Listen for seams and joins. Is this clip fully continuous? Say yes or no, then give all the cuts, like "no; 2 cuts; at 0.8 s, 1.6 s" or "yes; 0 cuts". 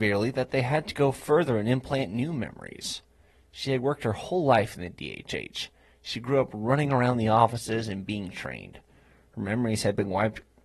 yes; 0 cuts